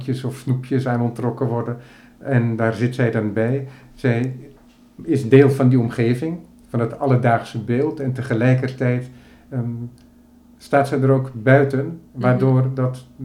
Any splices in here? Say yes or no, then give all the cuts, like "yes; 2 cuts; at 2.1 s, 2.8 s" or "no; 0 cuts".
no; 0 cuts